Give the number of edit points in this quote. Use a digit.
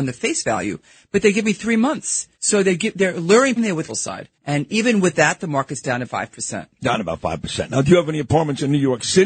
5